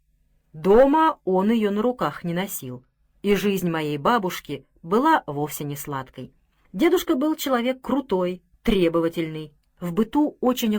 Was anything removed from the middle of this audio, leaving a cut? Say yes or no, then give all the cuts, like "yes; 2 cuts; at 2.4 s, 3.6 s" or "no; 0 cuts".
no; 0 cuts